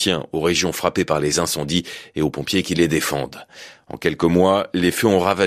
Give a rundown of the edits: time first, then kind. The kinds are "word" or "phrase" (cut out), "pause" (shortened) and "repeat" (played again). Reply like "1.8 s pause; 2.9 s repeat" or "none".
none